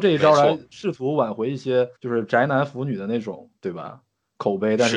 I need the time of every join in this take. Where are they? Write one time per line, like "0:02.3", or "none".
0:02.0
0:03.6